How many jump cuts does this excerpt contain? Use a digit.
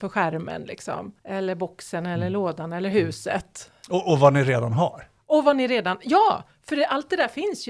1